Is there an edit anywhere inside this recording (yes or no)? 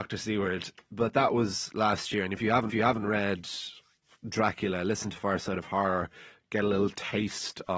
yes